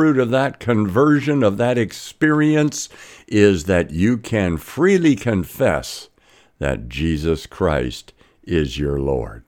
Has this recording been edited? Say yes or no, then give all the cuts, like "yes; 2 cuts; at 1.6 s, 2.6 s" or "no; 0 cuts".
no; 0 cuts